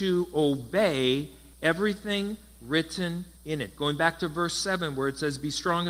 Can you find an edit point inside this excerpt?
yes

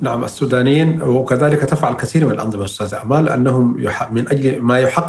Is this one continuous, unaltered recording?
yes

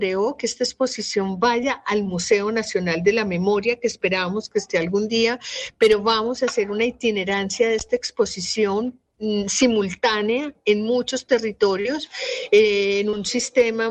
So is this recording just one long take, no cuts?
yes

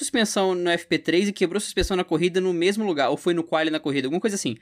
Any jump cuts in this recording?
no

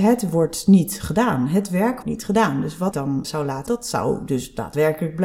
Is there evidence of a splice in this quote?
yes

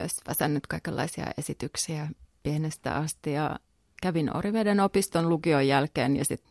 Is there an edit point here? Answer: no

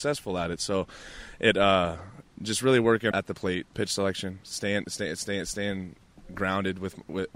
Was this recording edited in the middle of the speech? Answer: yes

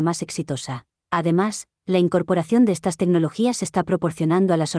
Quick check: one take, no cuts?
no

